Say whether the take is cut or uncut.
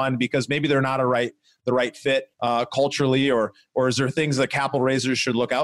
cut